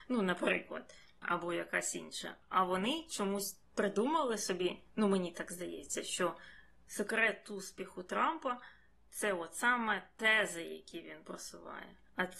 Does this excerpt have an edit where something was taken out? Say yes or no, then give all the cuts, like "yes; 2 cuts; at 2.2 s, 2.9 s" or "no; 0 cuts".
no; 0 cuts